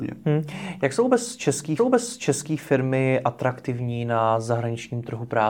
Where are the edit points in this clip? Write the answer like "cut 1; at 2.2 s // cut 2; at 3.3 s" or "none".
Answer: cut 1; at 1.8 s